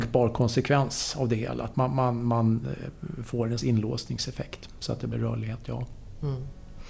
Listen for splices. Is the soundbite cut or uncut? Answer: cut